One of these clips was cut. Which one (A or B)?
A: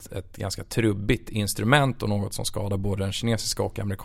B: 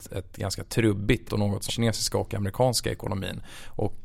B